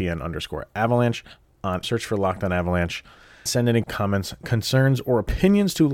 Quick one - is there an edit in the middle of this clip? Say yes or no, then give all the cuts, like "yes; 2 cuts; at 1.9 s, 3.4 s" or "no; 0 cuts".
yes; 3 cuts; at 1.8 s, 3.5 s, 3.8 s